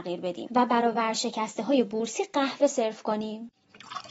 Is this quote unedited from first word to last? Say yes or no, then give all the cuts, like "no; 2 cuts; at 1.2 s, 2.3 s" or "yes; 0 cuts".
yes; 0 cuts